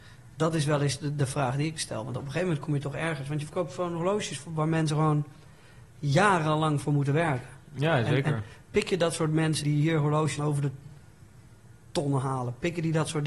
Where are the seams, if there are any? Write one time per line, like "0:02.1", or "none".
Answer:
0:09.6
0:10.4

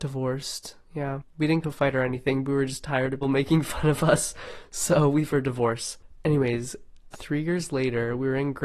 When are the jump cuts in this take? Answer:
0:01.6
0:03.2
0:05.3
0:07.1

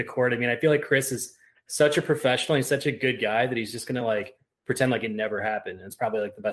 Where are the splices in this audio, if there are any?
none

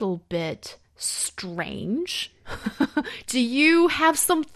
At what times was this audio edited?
0:03.3

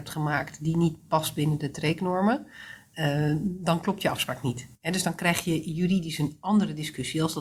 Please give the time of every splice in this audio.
0:04.7

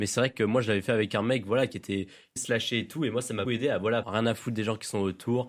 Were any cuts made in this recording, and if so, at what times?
0:02.4
0:03.4
0:04.0

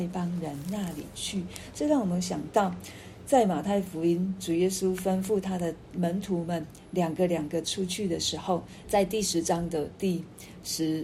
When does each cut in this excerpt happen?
0:08.8

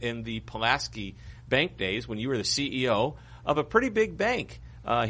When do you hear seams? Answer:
none

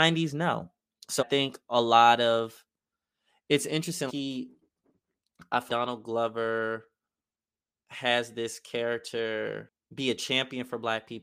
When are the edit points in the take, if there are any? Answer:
0:01.2
0:04.1
0:05.7

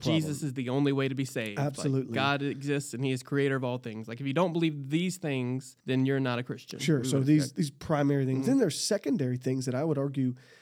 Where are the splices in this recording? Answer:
0:05.8

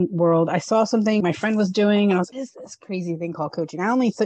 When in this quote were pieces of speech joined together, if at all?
0:01.2
0:02.3

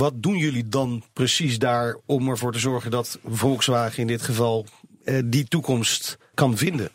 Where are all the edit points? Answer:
none

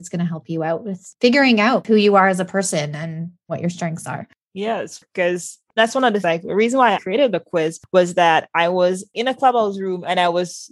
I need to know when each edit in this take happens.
0:06.2
0:07.0

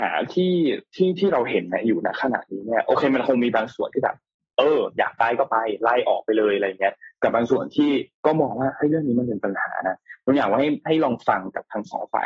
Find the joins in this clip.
0:04.4

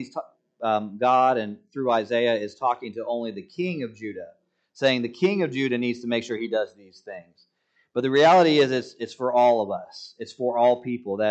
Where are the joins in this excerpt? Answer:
none

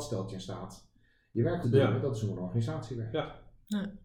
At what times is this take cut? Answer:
0:01.6

